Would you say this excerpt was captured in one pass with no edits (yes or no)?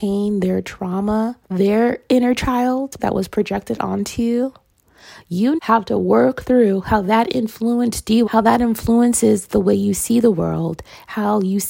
no